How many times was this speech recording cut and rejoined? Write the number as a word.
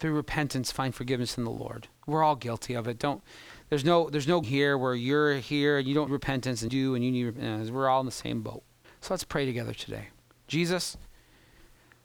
six